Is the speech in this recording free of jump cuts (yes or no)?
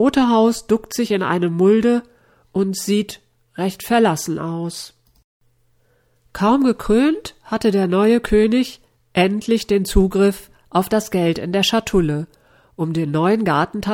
yes